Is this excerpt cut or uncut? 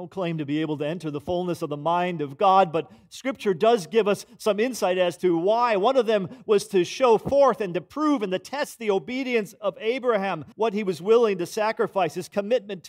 cut